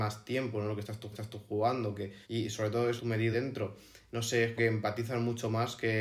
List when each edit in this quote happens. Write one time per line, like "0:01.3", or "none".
0:01.1
0:02.2
0:03.0
0:03.3
0:04.6